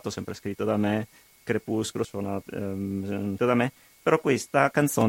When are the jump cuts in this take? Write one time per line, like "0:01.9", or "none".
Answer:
0:02.0
0:03.4